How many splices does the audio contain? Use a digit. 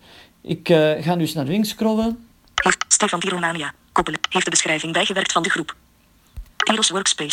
0